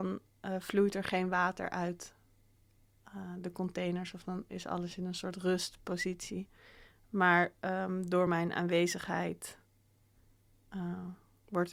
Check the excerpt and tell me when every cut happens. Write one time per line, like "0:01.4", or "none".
none